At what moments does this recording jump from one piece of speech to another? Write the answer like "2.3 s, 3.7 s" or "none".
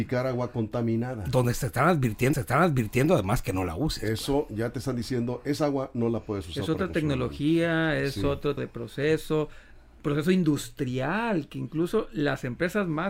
2.3 s, 8.6 s